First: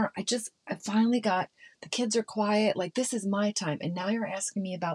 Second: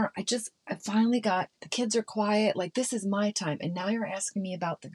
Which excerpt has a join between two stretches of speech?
second; 1 cut; at 1.6 s

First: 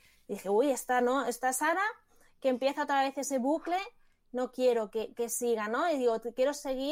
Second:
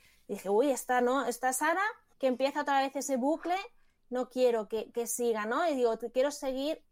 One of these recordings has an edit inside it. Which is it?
second; 1 cut; at 2.1 s

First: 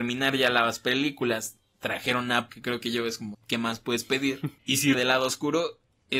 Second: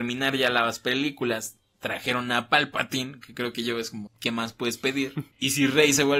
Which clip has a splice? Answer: first; 2 cuts; at 2.5 s, 4.9 s

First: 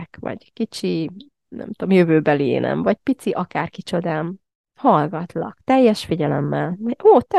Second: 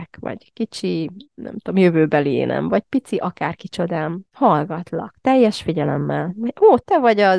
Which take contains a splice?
second; 2 cuts; at 1.2 s, 4.3 s

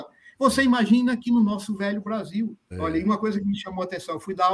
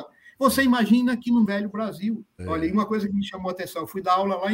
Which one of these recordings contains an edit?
second; 1 cut; at 1.5 s

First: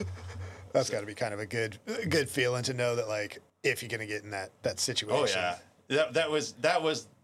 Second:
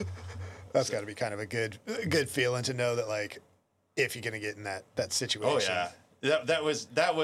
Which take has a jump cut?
first; 1 cut; at 3.5 s

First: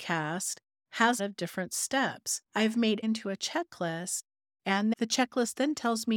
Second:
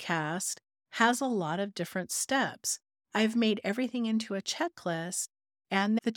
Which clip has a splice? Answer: first; 3 cuts; at 1.2 s, 2.4 s, 3.0 s

